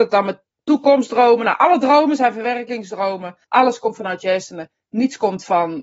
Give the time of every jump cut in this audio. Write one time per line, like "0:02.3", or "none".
0:03.4